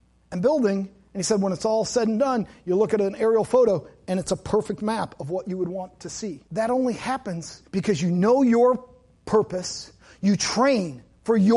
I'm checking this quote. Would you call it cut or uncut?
cut